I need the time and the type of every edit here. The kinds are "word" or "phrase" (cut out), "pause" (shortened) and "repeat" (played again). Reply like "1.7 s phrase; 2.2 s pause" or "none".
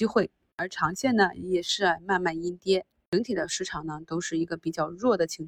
none